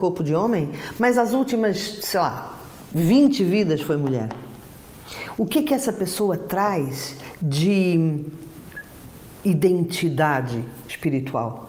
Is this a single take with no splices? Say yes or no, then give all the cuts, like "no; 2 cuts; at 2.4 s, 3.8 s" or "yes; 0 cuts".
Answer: yes; 0 cuts